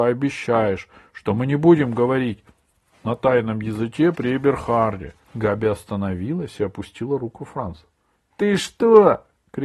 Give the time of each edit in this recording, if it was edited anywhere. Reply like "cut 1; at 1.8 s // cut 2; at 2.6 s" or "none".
cut 1; at 5.2 s